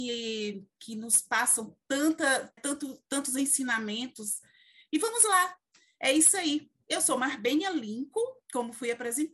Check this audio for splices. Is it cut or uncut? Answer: cut